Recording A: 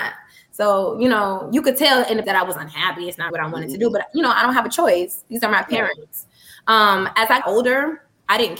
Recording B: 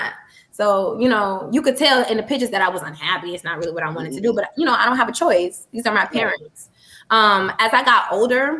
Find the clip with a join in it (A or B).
A